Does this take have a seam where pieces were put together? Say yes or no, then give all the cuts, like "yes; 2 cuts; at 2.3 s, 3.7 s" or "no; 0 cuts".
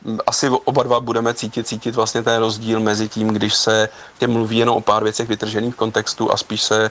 yes; 2 cuts; at 1.6 s, 4.2 s